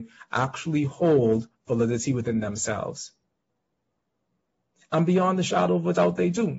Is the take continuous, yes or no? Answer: yes